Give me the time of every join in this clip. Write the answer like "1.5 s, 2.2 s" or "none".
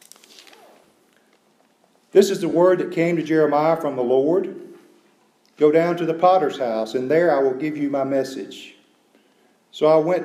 none